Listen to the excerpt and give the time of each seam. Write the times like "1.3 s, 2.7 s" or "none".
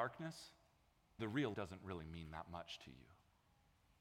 1.2 s, 1.5 s